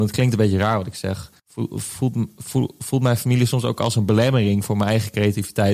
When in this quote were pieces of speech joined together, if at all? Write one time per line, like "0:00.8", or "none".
0:01.4